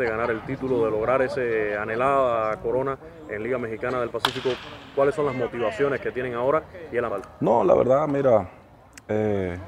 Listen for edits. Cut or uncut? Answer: cut